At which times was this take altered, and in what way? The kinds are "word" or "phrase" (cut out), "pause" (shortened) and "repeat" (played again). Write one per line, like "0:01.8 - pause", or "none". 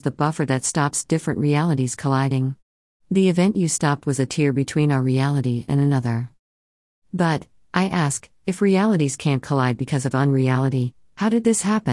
none